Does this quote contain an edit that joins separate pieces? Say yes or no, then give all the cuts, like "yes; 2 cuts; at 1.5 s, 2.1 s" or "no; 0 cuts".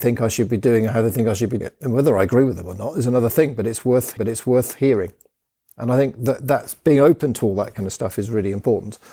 yes; 2 cuts; at 1.6 s, 4.2 s